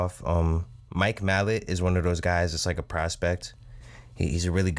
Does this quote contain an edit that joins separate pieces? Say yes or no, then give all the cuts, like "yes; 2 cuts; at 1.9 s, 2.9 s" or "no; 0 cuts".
no; 0 cuts